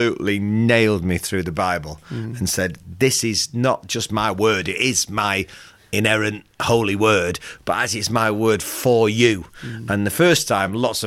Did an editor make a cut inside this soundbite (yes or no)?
no